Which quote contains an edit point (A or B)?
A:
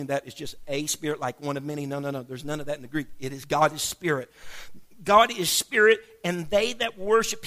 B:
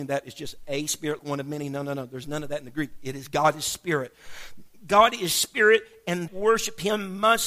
B